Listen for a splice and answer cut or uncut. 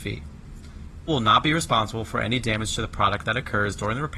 cut